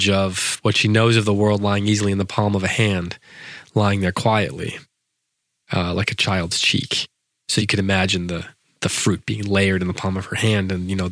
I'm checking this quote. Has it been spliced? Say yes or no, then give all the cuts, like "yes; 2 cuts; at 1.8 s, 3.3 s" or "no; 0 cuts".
no; 0 cuts